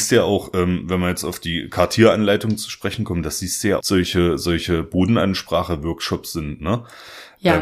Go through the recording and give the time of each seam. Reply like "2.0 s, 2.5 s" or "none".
3.8 s